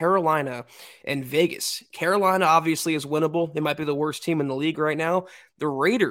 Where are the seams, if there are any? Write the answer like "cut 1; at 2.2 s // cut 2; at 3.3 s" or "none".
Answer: none